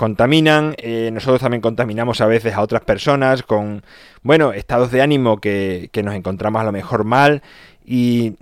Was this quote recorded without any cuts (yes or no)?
yes